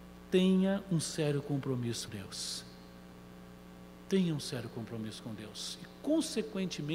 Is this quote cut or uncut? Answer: cut